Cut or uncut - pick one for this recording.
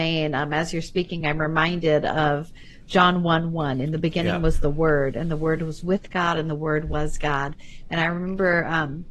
uncut